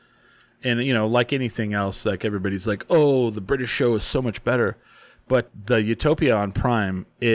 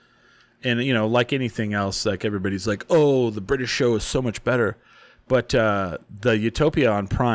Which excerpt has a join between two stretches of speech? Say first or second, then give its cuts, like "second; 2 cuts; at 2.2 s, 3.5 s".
first; 1 cut; at 5.5 s